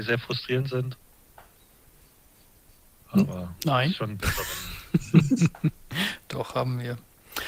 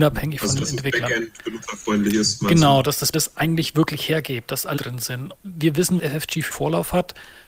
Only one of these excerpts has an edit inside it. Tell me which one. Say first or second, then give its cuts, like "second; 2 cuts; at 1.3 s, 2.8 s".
second; 5 cuts; at 3.1 s, 4.8 s, 5.4 s, 6.0 s, 6.5 s